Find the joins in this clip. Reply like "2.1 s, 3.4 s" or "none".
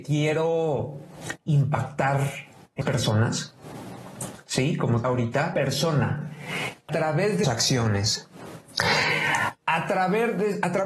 2.8 s, 5.0 s, 5.5 s, 6.9 s, 7.4 s